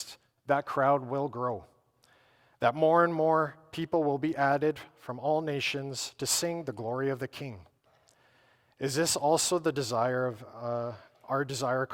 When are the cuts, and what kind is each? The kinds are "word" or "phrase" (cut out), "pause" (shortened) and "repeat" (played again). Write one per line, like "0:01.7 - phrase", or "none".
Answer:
none